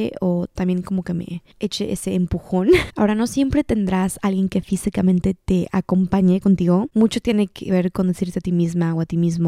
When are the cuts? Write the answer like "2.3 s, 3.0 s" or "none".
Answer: 1.5 s